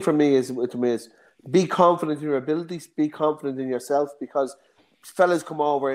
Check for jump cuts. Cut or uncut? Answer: uncut